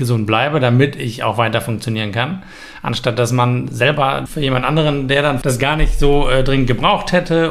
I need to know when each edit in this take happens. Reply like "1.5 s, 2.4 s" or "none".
4.3 s, 5.4 s